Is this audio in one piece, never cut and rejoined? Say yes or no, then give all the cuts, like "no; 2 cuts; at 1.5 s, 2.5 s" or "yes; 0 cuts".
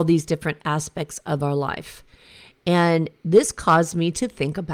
yes; 0 cuts